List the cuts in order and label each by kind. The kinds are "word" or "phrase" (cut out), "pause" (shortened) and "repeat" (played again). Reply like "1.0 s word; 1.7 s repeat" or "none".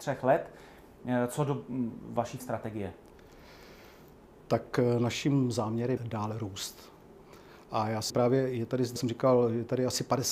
2.4 s word; 6.0 s word; 8.1 s word; 9.0 s word